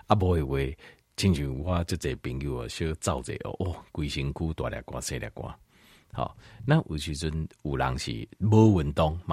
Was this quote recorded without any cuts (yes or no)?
yes